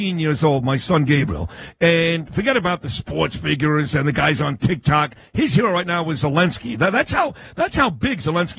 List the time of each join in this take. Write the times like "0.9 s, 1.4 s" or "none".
none